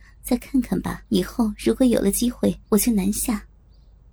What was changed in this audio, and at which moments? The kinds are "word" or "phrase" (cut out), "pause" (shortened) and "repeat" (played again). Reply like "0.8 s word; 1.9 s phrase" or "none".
1.1 s pause; 2.6 s pause